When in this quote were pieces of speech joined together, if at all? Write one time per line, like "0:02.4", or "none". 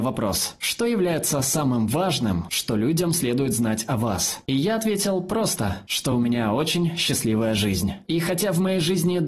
none